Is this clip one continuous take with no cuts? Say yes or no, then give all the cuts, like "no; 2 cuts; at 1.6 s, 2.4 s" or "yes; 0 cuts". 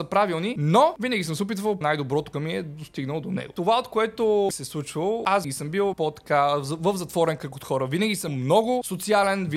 no; 6 cuts; at 1.8 s, 2.3 s, 4.5 s, 5.4 s, 5.9 s, 8.3 s